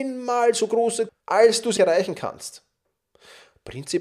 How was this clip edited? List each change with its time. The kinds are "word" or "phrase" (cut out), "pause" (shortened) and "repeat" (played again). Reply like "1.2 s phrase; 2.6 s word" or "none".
1.1 s word; 1.8 s word